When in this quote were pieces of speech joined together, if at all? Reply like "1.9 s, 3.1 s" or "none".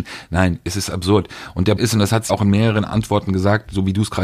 1.8 s, 2.3 s, 2.9 s